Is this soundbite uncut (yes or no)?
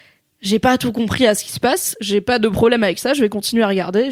yes